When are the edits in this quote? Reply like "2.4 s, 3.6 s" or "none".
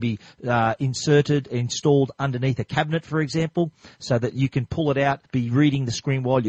5.3 s